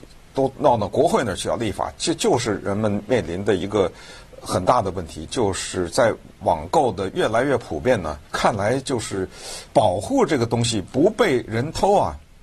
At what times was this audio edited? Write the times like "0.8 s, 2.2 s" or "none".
8.3 s, 9.7 s